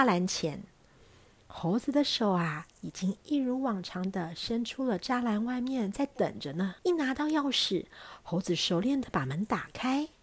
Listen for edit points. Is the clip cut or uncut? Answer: cut